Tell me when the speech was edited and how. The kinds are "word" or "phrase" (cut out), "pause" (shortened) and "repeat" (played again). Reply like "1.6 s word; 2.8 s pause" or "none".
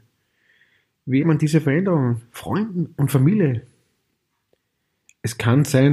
1.2 s word